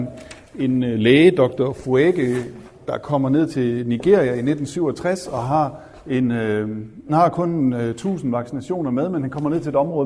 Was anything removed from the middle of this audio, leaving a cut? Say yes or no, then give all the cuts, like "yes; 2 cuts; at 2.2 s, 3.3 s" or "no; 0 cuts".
yes; 1 cut; at 7.1 s